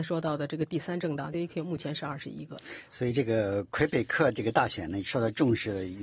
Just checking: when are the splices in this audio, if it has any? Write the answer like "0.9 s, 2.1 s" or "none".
1.3 s